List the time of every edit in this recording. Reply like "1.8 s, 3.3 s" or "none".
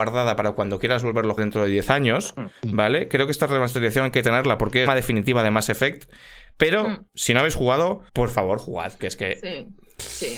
1.4 s, 4.9 s, 8.1 s, 9.0 s